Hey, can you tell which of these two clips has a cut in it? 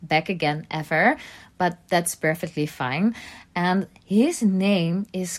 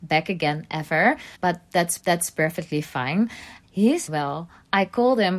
second; 4 cuts; at 1.3 s, 2.0 s, 3.6 s, 4.1 s

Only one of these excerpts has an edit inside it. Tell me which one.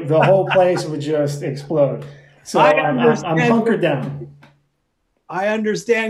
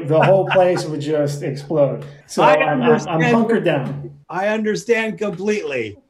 second; 2 cuts; at 2.2 s, 4.2 s

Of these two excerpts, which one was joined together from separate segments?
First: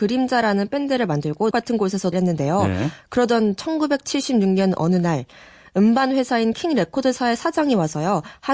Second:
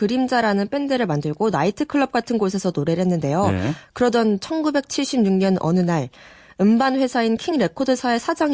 first; 2 cuts; at 1.5 s, 2.1 s

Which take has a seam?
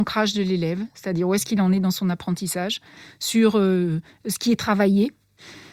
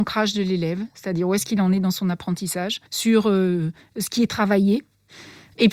second; 1 cut; at 2.9 s

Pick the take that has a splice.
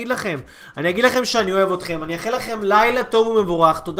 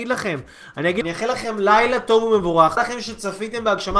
second; 2 cuts; at 1.0 s, 2.8 s

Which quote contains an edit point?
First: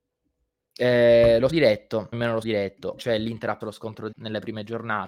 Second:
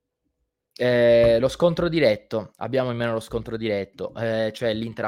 first; 6 cuts; at 1.5 s, 2.1 s, 2.4 s, 3.0 s, 3.6 s, 4.1 s

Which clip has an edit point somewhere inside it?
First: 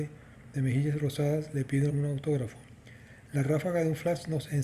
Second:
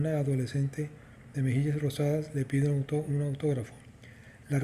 first; 1 cut; at 1.9 s

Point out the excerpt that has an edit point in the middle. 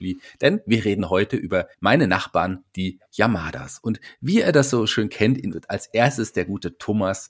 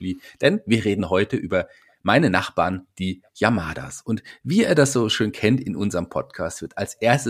first; 2 cuts; at 1.7 s, 5.5 s

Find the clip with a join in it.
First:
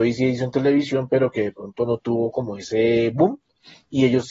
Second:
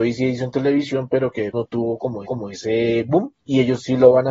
second; 3 cuts; at 1.5 s, 2.3 s, 3.4 s

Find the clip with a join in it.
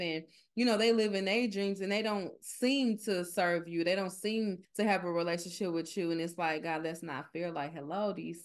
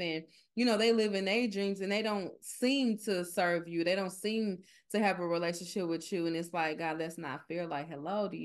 first; 1 cut; at 4.6 s

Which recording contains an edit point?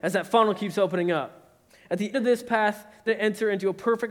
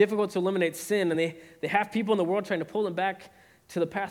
first; 3 cuts; at 1.7 s, 2.1 s, 3.1 s

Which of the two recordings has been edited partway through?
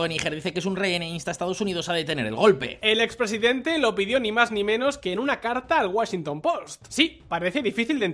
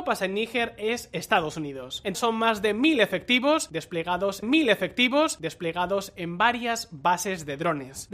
second; 2 cuts; at 2.1 s, 4.4 s

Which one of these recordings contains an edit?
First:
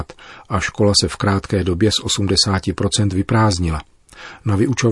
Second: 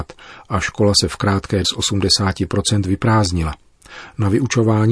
second; 1 cut; at 1.6 s

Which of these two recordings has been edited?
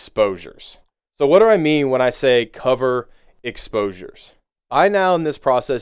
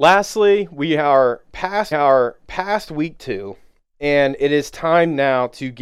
second; 1 cut; at 1.9 s

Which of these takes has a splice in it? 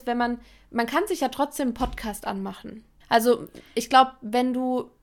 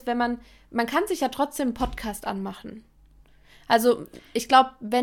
first; 1 cut; at 3.0 s

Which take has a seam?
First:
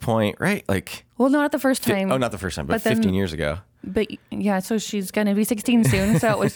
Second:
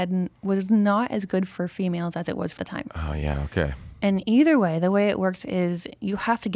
second; 1 cut; at 2.6 s

